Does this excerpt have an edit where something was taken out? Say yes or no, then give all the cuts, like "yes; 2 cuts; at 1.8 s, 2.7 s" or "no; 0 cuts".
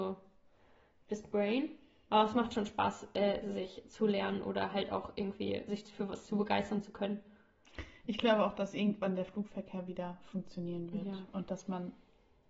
no; 0 cuts